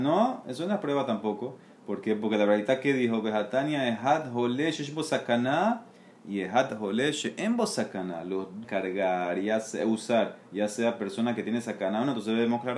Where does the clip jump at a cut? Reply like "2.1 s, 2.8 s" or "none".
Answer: 8.6 s